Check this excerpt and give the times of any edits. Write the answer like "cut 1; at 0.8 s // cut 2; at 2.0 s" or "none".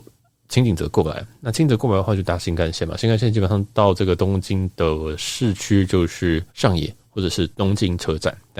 cut 1; at 6.5 s // cut 2; at 7.5 s

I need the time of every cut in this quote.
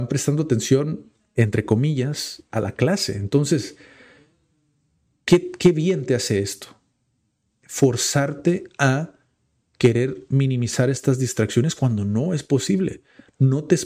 none

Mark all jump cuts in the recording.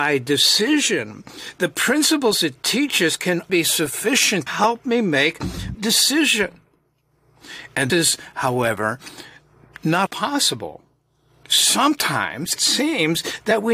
cut 1; at 3.5 s // cut 2; at 4.5 s // cut 3; at 5.7 s // cut 4; at 7.9 s // cut 5; at 10.1 s // cut 6; at 12.6 s

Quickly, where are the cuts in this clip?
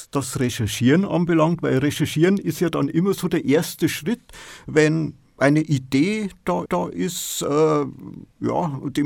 cut 1; at 6.7 s

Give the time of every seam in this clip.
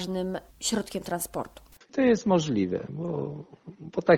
none

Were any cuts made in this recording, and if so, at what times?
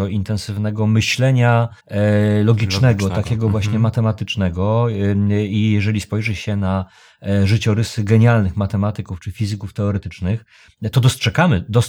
cut 1; at 1.8 s

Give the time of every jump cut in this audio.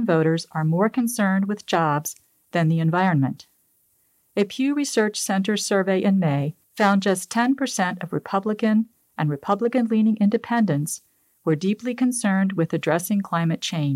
cut 1; at 6.6 s

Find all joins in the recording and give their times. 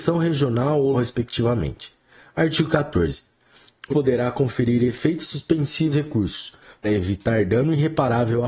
cut 1; at 0.9 s // cut 2; at 3.9 s // cut 3; at 5.9 s // cut 4; at 6.8 s

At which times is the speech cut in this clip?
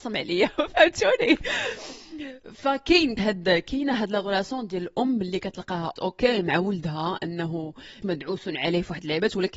cut 1; at 3.2 s // cut 2; at 6.0 s // cut 3; at 8.0 s

